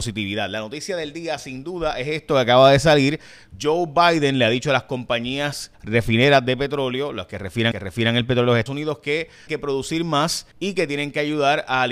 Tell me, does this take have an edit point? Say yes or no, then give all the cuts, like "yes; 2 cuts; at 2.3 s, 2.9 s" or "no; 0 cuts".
yes; 5 cuts; at 5.7 s, 7.7 s, 8.7 s, 9.5 s, 10.5 s